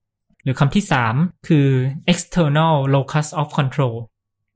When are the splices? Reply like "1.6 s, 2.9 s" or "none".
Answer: 1.4 s